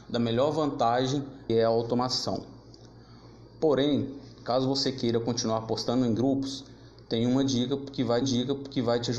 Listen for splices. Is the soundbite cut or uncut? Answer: cut